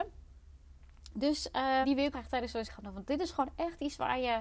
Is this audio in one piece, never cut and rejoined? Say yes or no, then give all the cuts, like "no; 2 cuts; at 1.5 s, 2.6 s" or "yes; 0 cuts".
no; 3 cuts; at 1.8 s, 2.1 s, 2.6 s